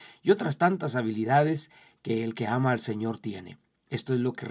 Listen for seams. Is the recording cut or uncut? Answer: uncut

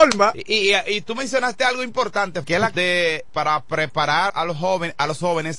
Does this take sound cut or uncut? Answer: cut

